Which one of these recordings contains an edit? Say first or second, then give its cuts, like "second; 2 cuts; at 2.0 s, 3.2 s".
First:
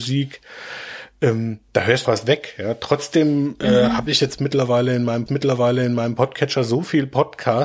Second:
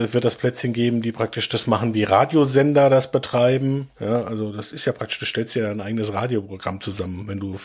first; 3 cuts; at 1.7 s, 2.1 s, 5.3 s